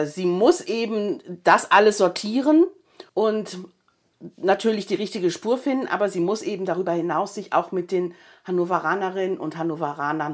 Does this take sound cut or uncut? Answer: cut